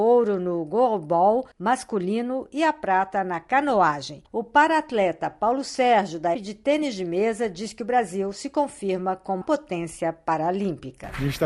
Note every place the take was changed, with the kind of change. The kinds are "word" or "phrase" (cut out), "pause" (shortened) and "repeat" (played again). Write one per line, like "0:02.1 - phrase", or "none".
0:01.5 - pause
0:04.3 - pause
0:06.3 - word
0:09.4 - word